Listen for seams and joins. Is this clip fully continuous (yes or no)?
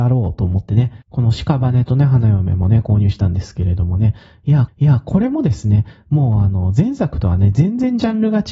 no